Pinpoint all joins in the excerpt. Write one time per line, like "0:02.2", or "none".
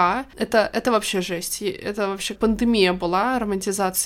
0:02.4